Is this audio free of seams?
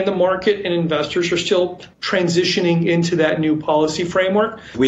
no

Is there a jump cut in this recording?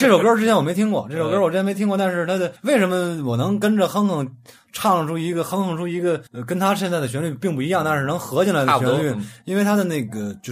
yes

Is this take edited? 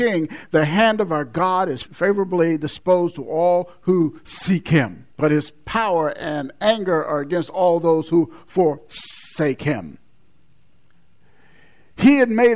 yes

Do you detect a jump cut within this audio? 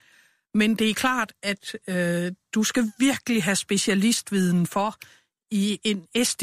no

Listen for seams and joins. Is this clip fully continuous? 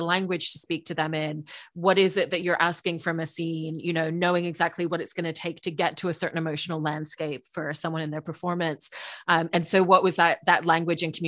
yes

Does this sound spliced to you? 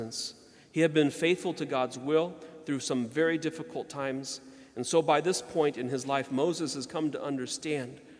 no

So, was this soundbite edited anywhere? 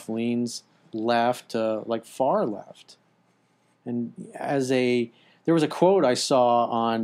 no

